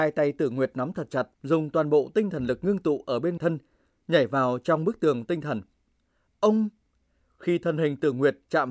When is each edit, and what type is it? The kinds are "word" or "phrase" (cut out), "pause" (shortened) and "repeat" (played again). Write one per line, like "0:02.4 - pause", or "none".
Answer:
0:01.3 - pause
0:03.4 - word